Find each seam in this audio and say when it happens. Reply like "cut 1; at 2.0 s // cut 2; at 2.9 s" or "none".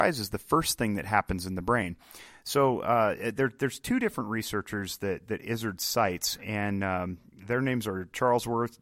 none